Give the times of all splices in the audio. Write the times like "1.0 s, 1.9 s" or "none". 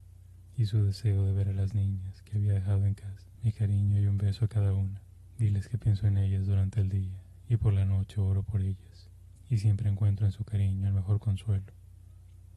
3.3 s, 5.2 s, 9.4 s